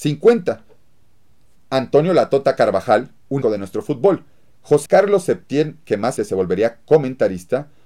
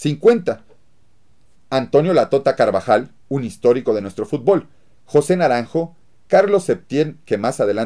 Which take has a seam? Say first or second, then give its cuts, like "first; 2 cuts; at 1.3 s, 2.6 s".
first; 3 cuts; at 3.4 s, 4.9 s, 6.2 s